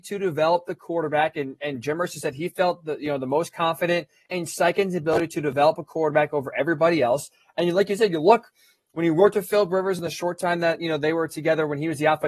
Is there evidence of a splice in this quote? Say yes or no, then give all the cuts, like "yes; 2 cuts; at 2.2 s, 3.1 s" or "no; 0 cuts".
no; 0 cuts